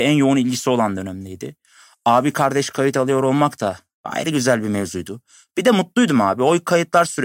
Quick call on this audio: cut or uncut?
uncut